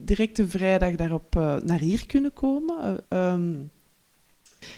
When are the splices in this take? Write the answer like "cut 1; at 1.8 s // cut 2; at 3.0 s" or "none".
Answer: cut 1; at 3.0 s